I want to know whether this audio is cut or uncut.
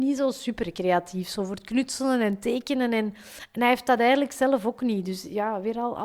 uncut